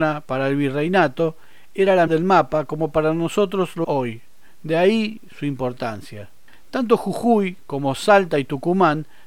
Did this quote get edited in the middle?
yes; 2 cuts; at 2.1 s, 3.8 s

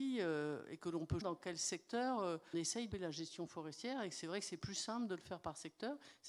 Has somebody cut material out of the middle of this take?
yes; 3 cuts; at 1.2 s, 2.5 s, 2.9 s

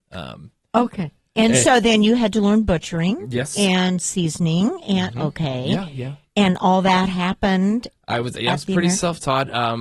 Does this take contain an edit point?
no; 0 cuts

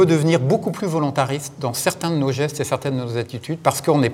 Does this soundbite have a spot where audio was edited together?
no; 0 cuts

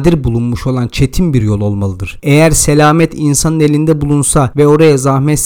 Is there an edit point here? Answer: no; 0 cuts

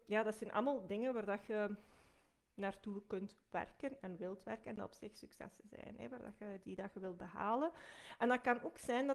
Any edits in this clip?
no; 0 cuts

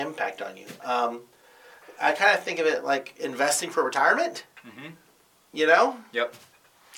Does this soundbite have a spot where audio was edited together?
no; 0 cuts

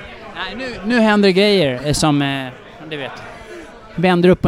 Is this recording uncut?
yes; 0 cuts

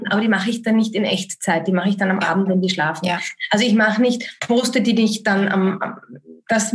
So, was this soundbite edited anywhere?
yes; 1 cut; at 4.4 s

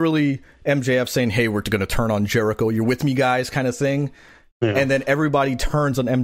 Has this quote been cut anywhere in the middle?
no; 0 cuts

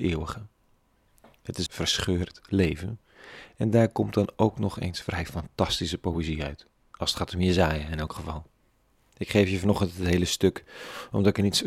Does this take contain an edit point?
yes; 1 cut; at 1.7 s

